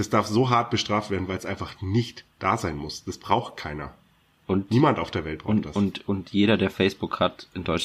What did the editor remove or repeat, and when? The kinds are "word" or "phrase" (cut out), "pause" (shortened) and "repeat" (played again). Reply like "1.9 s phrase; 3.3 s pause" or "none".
none

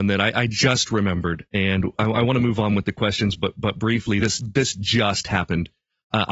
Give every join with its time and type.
none

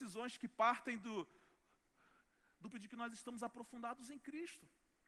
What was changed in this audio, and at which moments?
2.7 s word

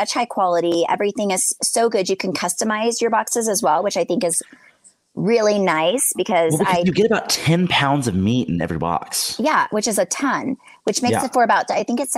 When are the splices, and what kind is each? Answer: none

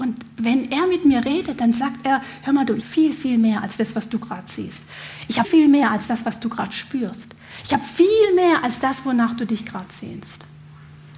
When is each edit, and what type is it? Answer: 2.8 s word; 5.4 s word

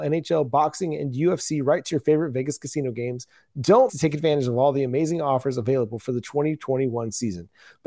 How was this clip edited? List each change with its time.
3.9 s word

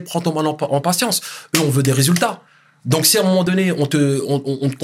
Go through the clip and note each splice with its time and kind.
none

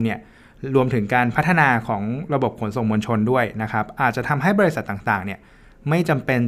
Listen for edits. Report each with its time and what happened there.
none

